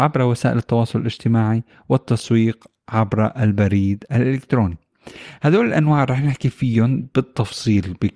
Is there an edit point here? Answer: no; 0 cuts

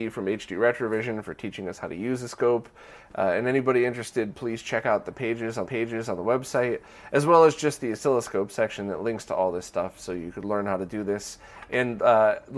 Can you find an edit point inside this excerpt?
yes; 1 cut; at 5.7 s

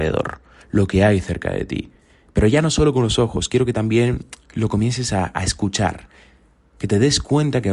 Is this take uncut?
yes; 0 cuts

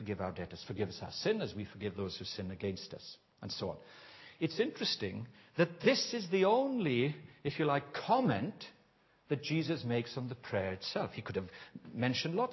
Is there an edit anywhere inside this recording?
no; 0 cuts

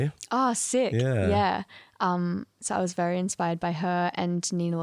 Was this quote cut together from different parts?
no; 0 cuts

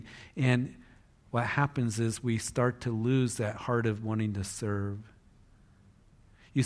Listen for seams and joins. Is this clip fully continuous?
yes; 0 cuts

